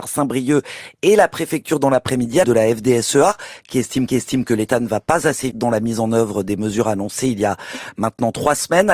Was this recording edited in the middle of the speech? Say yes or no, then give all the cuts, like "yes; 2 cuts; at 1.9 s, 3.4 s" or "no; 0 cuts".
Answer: yes; 3 cuts; at 2.4 s, 4.1 s, 5.5 s